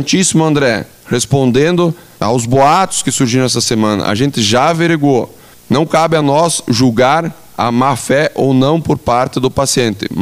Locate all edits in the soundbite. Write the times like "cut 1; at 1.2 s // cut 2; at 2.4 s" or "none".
none